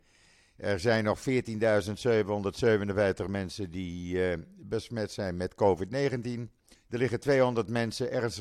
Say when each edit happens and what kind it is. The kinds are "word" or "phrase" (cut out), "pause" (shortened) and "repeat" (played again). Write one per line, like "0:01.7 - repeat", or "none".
0:06.8 - pause